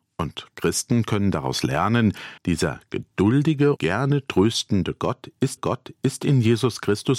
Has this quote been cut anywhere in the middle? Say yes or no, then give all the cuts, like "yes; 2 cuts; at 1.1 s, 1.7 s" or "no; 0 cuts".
yes; 3 cuts; at 2.4 s, 3.8 s, 5.6 s